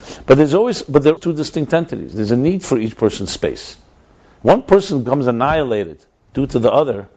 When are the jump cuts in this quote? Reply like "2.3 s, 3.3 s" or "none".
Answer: 1.2 s